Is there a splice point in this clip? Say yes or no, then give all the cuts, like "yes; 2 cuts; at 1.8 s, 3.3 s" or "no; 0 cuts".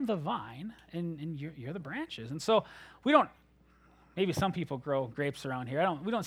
no; 0 cuts